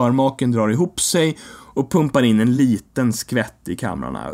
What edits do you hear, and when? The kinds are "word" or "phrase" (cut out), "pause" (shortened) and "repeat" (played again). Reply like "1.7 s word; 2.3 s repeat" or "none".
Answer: none